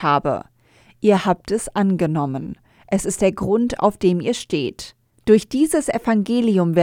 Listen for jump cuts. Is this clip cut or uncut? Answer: uncut